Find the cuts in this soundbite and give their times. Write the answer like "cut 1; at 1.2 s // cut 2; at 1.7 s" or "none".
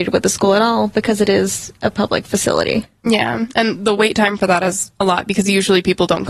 cut 1; at 5.0 s